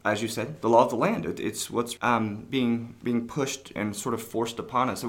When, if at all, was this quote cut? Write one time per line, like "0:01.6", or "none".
0:02.0
0:03.8